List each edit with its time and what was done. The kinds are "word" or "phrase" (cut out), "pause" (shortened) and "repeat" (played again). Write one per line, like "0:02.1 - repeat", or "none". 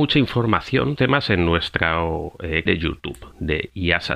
0:01.0 - phrase
0:02.7 - word